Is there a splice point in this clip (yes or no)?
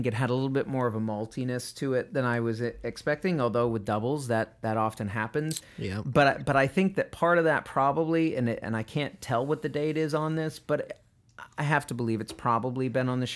no